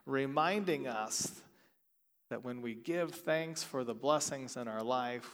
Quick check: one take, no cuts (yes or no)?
yes